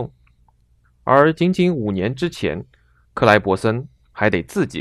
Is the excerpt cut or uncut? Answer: uncut